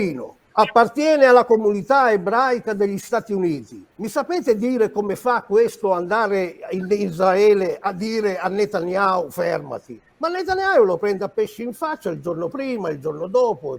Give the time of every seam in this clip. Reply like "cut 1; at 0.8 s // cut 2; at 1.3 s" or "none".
cut 1; at 3.9 s // cut 2; at 10.1 s